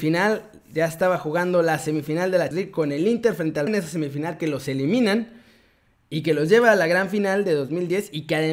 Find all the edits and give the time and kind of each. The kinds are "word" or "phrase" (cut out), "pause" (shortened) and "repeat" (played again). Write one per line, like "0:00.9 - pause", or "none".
0:02.5 - word
0:03.7 - word